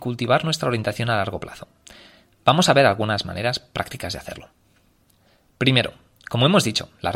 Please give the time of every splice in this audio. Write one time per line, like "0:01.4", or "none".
none